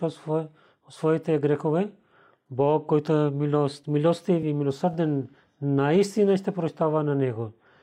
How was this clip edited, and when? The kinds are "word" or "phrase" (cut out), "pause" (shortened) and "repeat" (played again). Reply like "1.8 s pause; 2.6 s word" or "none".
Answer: none